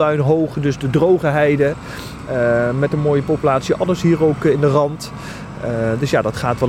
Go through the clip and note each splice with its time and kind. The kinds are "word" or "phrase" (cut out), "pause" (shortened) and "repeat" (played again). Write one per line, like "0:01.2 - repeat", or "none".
none